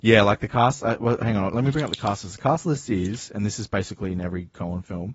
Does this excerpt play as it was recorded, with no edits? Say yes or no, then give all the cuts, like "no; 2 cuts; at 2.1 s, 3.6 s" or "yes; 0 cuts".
yes; 0 cuts